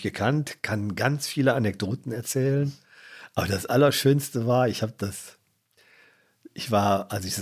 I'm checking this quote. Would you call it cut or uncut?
uncut